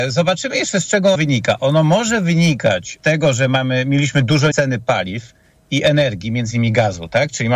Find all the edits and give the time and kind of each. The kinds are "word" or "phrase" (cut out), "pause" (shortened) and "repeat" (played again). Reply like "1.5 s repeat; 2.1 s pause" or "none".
1.1 s word; 3.0 s word; 4.5 s word